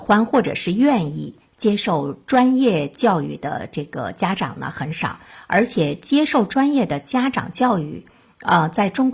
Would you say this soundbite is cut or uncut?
uncut